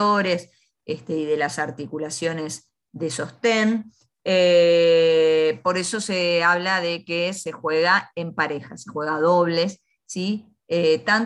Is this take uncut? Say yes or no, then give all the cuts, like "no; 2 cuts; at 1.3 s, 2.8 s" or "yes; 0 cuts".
yes; 0 cuts